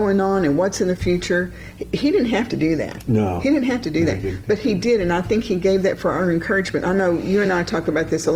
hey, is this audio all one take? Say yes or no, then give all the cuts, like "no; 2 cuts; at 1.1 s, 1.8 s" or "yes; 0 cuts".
yes; 0 cuts